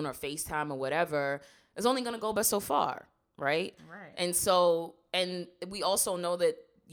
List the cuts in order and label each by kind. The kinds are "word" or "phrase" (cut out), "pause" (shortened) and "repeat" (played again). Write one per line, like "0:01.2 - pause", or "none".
none